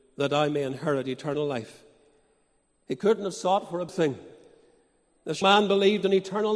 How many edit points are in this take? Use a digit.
2